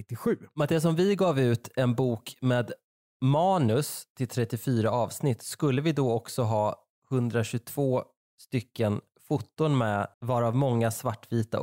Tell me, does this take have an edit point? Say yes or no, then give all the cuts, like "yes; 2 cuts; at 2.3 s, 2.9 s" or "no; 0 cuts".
yes; 1 cut; at 10.1 s